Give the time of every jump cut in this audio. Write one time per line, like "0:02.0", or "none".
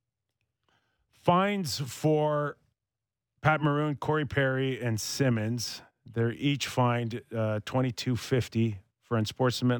none